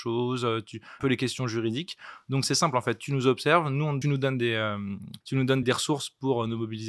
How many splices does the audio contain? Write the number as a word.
four